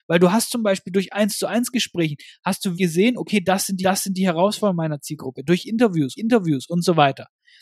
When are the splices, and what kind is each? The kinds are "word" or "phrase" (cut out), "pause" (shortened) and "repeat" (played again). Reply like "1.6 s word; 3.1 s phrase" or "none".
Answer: 2.7 s word; 3.8 s repeat; 6.2 s repeat